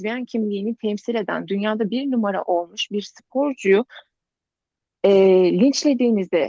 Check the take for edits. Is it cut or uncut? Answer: uncut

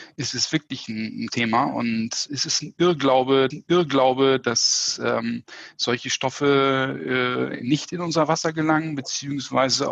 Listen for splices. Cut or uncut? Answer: cut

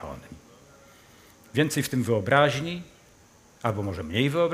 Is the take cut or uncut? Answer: uncut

